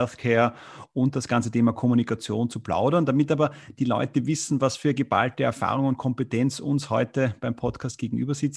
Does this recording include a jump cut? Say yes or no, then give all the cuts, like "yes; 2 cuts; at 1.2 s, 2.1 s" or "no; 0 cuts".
no; 0 cuts